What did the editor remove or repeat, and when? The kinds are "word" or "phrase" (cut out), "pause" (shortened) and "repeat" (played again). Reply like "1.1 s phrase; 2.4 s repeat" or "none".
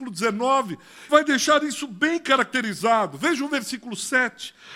1.1 s word